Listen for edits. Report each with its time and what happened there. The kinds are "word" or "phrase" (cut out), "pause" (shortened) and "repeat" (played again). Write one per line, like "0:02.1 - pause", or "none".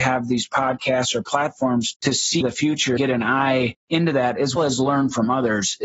0:02.4 - word
0:03.0 - word
0:03.8 - pause
0:04.6 - word